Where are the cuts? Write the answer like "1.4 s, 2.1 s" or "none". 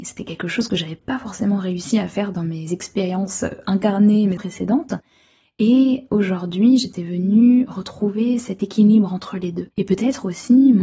4.4 s, 9.7 s

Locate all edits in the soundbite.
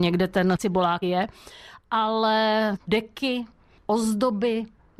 1.0 s, 2.8 s

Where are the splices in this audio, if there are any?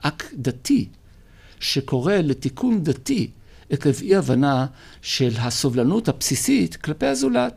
none

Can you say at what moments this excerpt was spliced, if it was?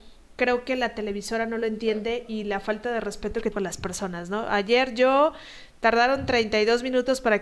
3.5 s

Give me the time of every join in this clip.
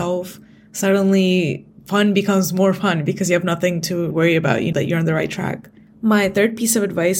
4.1 s, 4.7 s

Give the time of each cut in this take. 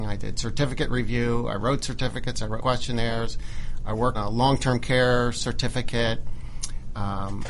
2.6 s, 4.1 s

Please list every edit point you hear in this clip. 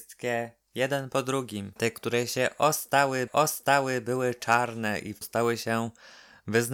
1.8 s, 3.3 s, 5.2 s

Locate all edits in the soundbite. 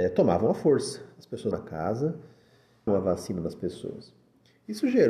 1.5 s, 2.9 s

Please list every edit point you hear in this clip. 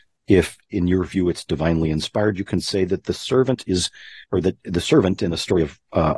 4.2 s

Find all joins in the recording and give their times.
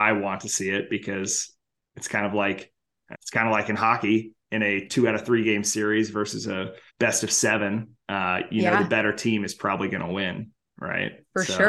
3.1 s, 4.4 s, 6.9 s, 8.0 s

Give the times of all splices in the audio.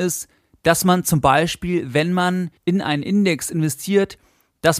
2.6 s

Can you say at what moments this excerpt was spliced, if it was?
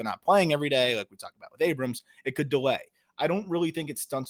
none

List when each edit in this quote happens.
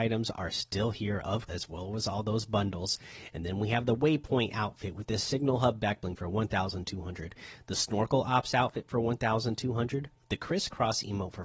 1.5 s

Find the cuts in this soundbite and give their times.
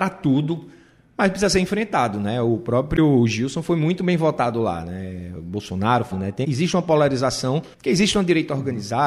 6.1 s, 6.4 s, 7.7 s

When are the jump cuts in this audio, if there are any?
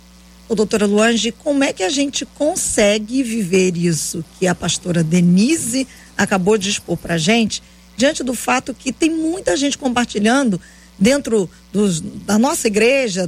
none

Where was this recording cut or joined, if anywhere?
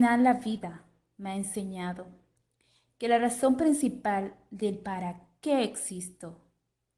none

